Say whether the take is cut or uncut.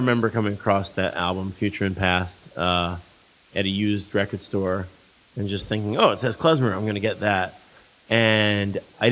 uncut